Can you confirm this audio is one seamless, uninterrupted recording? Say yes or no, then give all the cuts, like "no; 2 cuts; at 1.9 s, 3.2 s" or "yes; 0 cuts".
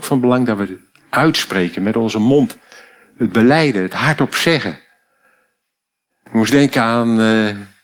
yes; 0 cuts